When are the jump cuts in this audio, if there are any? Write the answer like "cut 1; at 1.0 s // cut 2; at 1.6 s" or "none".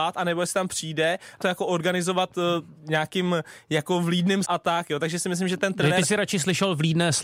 cut 1; at 1.4 s // cut 2; at 2.8 s // cut 3; at 4.4 s